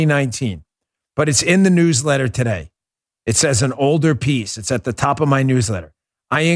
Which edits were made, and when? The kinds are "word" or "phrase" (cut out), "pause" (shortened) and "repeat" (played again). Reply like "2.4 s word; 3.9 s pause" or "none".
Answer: none